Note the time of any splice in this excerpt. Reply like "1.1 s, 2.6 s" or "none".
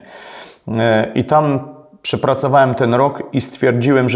none